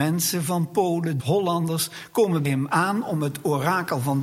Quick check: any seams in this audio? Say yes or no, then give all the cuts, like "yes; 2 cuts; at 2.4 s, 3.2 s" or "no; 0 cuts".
yes; 2 cuts; at 1.2 s, 2.4 s